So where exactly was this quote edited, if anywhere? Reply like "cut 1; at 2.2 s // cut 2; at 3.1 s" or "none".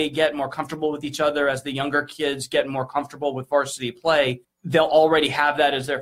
cut 1; at 4.4 s